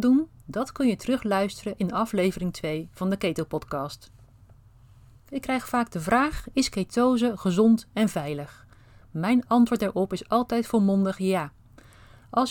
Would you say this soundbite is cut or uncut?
uncut